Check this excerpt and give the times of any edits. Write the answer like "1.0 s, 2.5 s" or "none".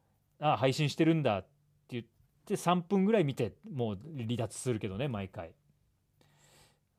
none